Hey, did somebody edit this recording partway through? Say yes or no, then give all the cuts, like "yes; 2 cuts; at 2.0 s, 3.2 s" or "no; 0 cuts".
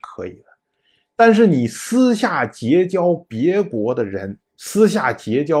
yes; 1 cut; at 4.5 s